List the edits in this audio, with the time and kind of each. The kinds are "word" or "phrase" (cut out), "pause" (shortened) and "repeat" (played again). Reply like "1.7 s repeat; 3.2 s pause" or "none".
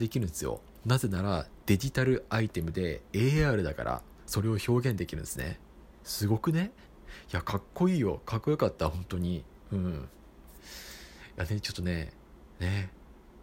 none